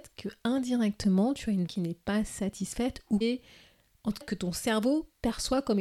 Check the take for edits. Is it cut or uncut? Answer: cut